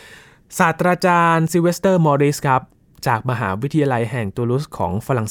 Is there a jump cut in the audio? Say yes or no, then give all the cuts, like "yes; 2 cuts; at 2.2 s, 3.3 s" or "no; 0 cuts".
no; 0 cuts